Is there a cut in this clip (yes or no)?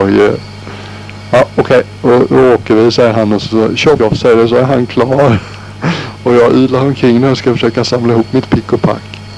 yes